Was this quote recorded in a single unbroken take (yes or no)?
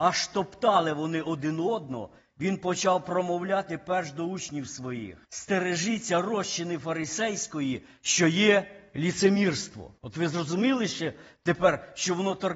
no